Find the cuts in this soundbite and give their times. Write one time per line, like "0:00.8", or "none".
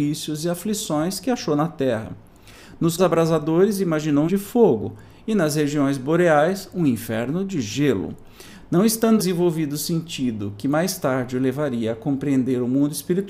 0:03.0
0:04.3
0:09.2